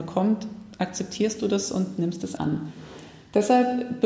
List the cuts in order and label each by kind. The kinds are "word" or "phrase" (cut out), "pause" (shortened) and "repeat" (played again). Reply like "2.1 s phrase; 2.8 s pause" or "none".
2.4 s word